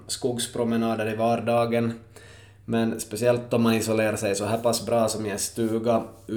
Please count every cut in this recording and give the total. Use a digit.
0